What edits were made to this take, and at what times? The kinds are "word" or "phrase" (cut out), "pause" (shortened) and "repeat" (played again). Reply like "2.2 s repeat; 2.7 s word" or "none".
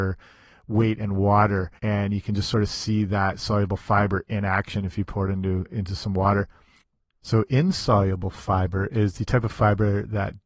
1.8 s pause

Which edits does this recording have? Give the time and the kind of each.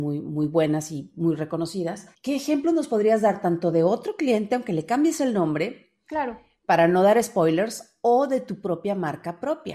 2.1 s pause

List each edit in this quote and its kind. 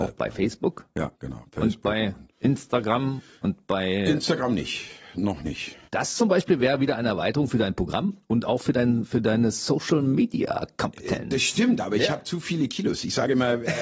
1.1 s pause; 2.3 s pause; 5.9 s pause

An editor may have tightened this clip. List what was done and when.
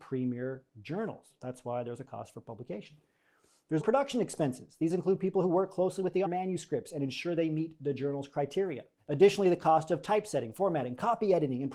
3.8 s word; 4.9 s word; 6.2 s phrase; 9.0 s pause

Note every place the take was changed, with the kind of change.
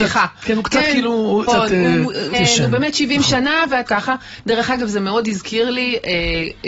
1.5 s phrase; 2.3 s word; 3.9 s word

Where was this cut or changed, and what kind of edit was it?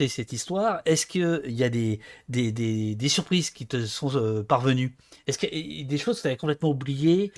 none

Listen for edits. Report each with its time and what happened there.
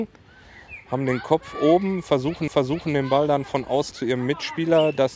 2.5 s repeat; 3.9 s word

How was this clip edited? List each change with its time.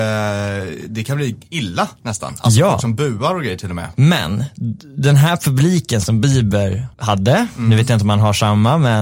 6.9 s pause

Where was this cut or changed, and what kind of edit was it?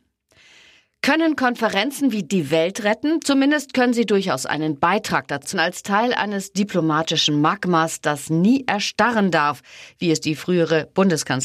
2.2 s word; 5.5 s word

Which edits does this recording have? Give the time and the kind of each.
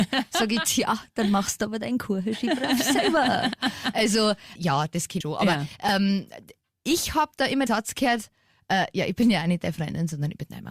4.6 s word; 5.2 s word; 7.7 s word

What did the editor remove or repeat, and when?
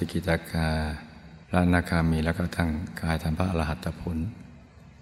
1.4 s pause

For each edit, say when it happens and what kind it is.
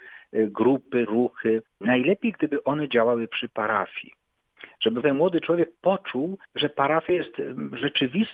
1.1 s word; 1.7 s pause; 5.0 s word; 6.5 s pause

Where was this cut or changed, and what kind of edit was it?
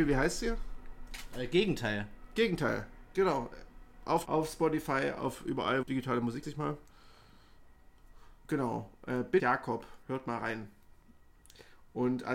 4.3 s word; 5.8 s phrase; 6.4 s phrase; 8.4 s pause; 9.4 s word; 10.0 s pause

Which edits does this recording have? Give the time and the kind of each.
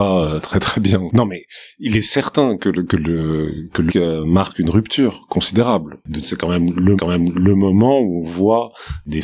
3.9 s word; 6.2 s phrase; 7.0 s repeat

